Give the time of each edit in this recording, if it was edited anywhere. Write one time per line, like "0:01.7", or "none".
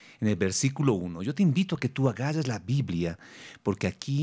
none